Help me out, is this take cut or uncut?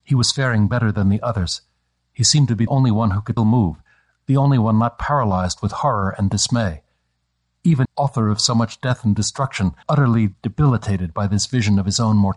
cut